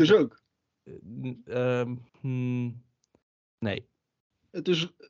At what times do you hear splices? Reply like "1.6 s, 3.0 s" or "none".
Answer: 2.1 s